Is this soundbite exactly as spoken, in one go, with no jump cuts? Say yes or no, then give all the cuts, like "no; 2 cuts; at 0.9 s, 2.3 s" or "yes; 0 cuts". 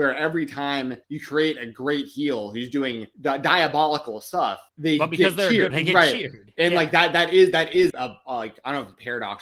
no; 5 cuts; at 1.0 s, 3.1 s, 4.7 s, 5.7 s, 7.9 s